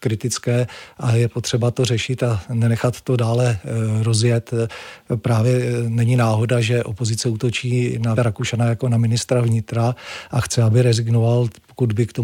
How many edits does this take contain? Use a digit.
1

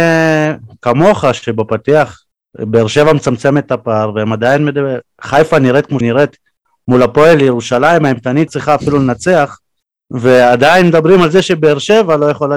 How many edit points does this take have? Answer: 4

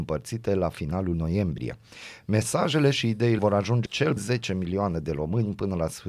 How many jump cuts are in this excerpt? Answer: 4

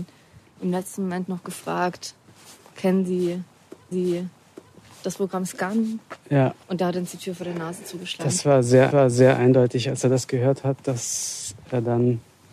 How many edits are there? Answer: 3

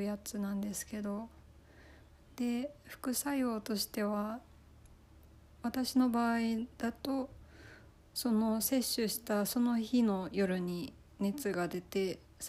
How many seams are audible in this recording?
0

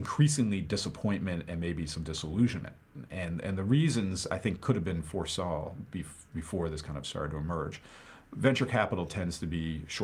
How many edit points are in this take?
0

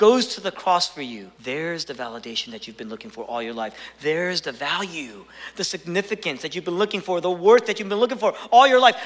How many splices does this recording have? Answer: 1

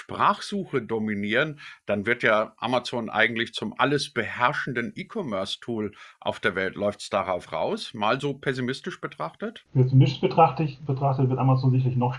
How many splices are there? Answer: 0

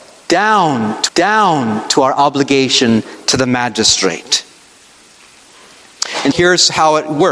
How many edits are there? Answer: 2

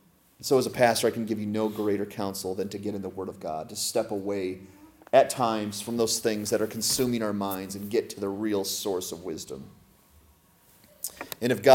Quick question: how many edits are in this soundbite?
0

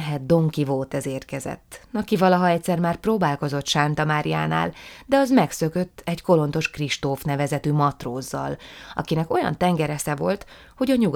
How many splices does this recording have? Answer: 0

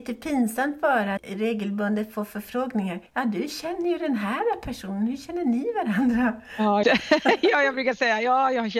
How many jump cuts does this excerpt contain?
3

